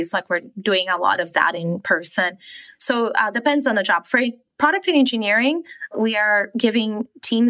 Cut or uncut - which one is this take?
uncut